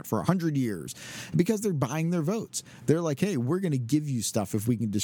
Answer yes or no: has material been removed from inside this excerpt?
no